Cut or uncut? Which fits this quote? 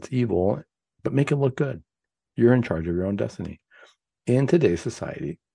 uncut